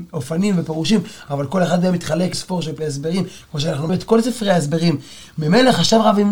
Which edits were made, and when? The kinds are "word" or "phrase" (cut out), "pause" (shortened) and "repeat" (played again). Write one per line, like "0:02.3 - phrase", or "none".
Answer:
0:02.3 - word
0:02.8 - word
0:03.9 - word